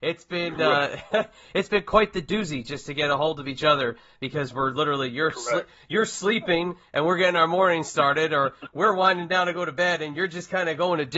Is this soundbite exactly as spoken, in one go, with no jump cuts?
yes; 0 cuts

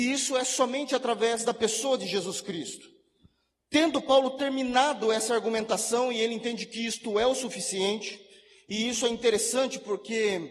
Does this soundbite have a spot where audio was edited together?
no; 0 cuts

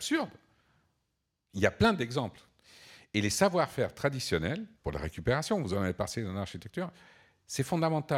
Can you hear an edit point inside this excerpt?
yes; 1 cut; at 4.8 s

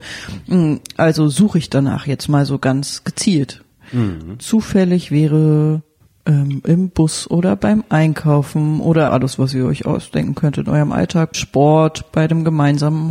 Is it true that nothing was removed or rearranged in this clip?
no; 4 cuts; at 4.4 s, 6.0 s, 9.1 s, 11.3 s

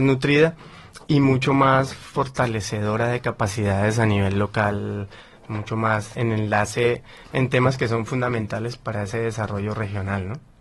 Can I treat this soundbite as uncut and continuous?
yes; 0 cuts

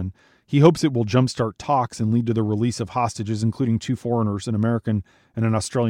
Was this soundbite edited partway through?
no; 0 cuts

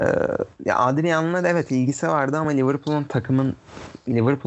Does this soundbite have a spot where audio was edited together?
no; 0 cuts

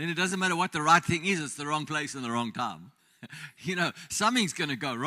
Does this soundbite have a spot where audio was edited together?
yes; 1 cut; at 3.0 s

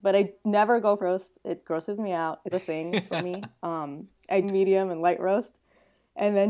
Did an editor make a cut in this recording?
yes; 3 cuts; at 1.0 s, 2.5 s, 4.4 s

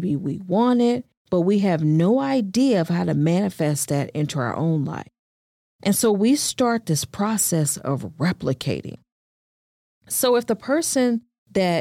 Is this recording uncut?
yes; 0 cuts

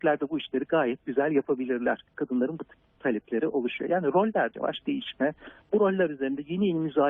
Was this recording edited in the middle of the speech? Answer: yes; 2 cuts; at 2.1 s, 4.5 s

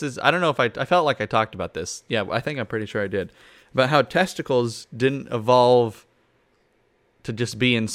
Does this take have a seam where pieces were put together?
no; 0 cuts

